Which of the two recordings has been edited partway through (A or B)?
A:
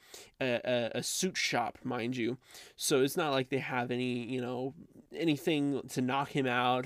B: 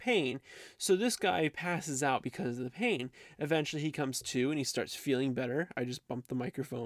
A